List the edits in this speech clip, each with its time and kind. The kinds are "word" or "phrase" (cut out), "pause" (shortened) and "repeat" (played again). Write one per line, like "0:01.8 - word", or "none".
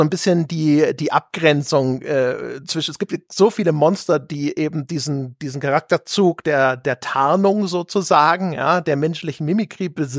none